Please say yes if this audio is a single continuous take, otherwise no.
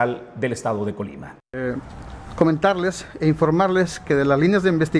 no